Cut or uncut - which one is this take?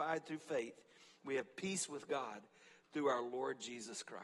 uncut